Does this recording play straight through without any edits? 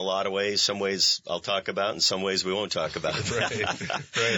yes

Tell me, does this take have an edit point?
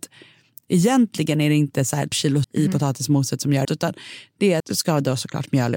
yes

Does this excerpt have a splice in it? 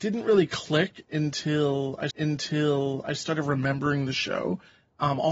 yes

